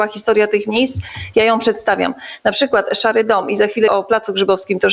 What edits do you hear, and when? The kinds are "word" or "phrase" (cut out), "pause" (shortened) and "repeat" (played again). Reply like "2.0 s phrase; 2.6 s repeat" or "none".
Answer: 3.9 s word